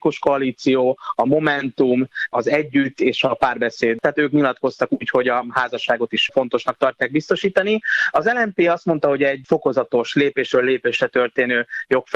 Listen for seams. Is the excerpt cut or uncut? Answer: cut